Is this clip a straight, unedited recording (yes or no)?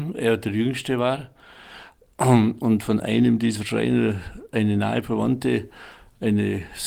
yes